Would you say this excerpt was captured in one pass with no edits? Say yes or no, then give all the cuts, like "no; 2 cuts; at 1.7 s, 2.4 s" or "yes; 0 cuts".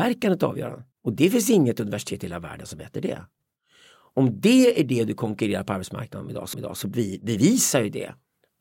no; 2 cuts; at 0.9 s, 6.5 s